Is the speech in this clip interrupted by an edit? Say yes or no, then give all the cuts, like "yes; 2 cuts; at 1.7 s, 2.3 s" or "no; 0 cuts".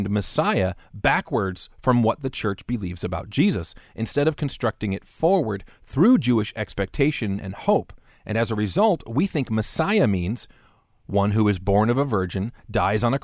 no; 0 cuts